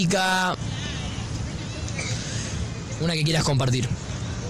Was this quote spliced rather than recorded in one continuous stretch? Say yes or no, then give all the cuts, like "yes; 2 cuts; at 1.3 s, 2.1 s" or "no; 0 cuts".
no; 0 cuts